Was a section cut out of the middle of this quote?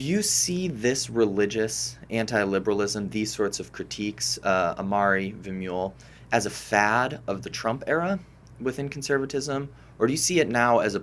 no; 0 cuts

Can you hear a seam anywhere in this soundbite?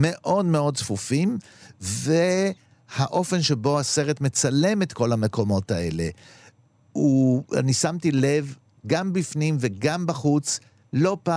no; 0 cuts

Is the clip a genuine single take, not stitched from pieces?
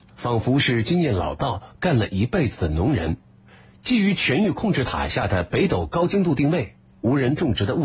yes; 0 cuts

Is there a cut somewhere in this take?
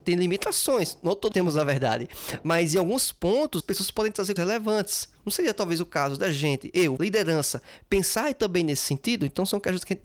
yes; 4 cuts; at 1.3 s, 3.6 s, 4.4 s, 7.0 s

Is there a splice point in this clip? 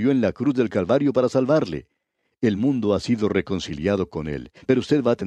no; 0 cuts

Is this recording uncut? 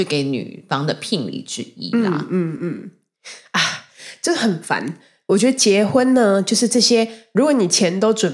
yes; 0 cuts

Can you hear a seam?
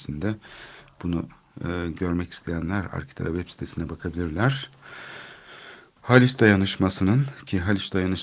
no; 0 cuts

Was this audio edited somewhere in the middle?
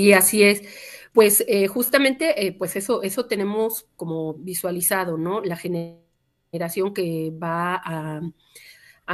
no; 0 cuts

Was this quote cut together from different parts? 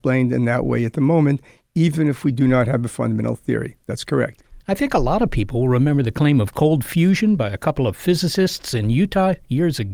no; 0 cuts

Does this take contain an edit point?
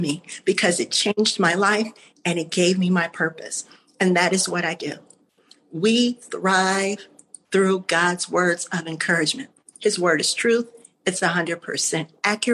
no; 0 cuts

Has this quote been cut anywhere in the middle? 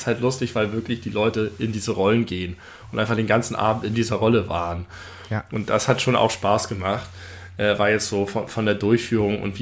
no; 0 cuts

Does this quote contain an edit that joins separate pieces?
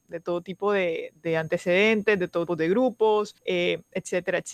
yes; 3 cuts; at 1.1 s, 2.5 s, 3.4 s

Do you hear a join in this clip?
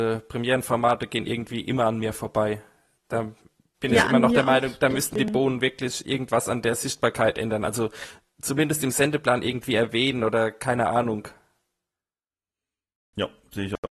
no; 0 cuts

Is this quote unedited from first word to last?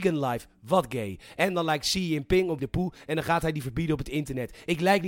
no; 2 cuts; at 2.6 s, 3.6 s

